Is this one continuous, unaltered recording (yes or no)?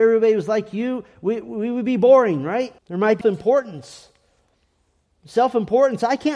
no